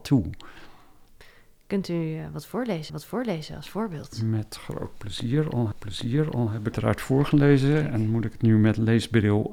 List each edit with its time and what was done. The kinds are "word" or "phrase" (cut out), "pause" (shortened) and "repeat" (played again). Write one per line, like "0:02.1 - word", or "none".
0:02.9 - repeat
0:05.7 - repeat
0:06.7 - phrase

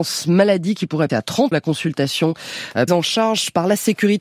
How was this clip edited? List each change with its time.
0:01.1 - word
0:01.5 - word
0:02.9 - word

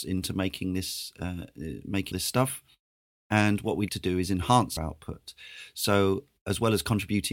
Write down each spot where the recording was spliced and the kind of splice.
0:02.1 - word
0:03.9 - word
0:04.8 - word

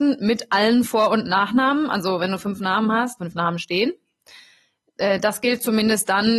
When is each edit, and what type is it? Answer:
0:03.2 - phrase

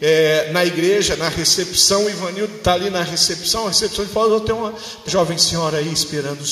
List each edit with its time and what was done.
0:05.1 - word

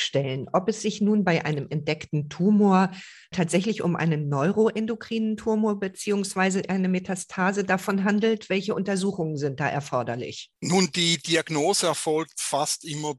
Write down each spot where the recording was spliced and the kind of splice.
0:10.6 - pause

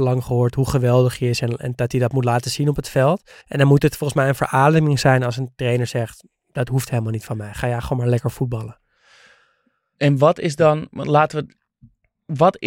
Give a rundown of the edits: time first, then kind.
0:03.4 - pause

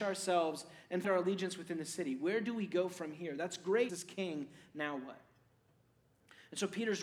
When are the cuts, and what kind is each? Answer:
0:01.0 - word
0:03.9 - word

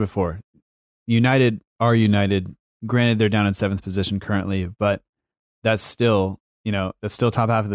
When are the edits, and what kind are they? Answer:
none

